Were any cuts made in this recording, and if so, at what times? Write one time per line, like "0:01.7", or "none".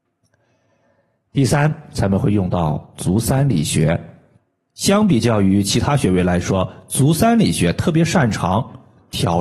0:04.4